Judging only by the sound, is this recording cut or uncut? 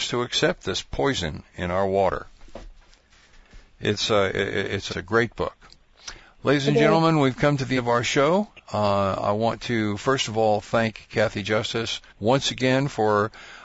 cut